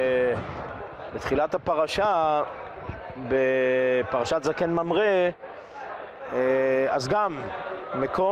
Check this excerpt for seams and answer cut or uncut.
uncut